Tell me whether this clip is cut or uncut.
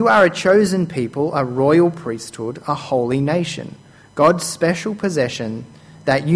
uncut